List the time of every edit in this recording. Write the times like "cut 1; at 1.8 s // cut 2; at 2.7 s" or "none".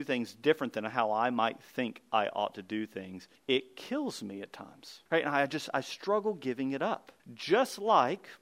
cut 1; at 3.3 s // cut 2; at 5.1 s // cut 3; at 7.2 s